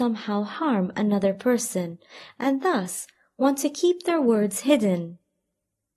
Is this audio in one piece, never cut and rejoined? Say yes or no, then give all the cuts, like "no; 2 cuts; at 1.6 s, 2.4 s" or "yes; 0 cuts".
yes; 0 cuts